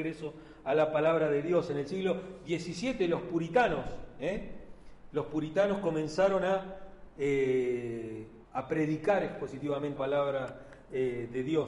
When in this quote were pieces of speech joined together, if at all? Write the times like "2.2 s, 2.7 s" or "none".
8.4 s, 10.0 s